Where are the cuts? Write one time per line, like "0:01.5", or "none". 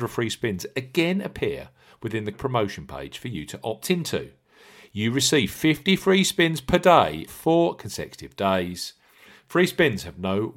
0:02.3
0:07.3